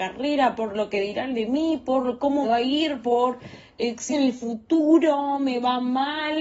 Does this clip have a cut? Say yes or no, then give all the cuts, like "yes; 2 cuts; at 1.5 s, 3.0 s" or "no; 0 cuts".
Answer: yes; 2 cuts; at 2.4 s, 4.1 s